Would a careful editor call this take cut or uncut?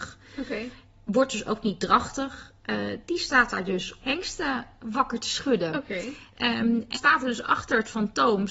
cut